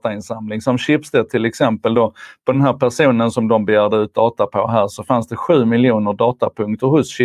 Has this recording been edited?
no; 0 cuts

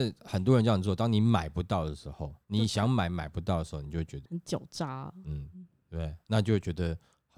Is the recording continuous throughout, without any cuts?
no; 2 cuts; at 2.4 s, 4.2 s

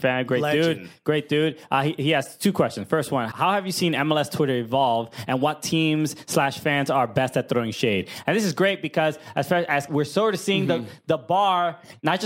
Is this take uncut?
no; 2 cuts; at 3.3 s, 9.9 s

